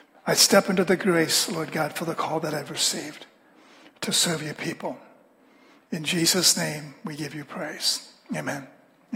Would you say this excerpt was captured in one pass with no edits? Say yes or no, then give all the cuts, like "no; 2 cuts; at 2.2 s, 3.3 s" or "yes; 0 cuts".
yes; 0 cuts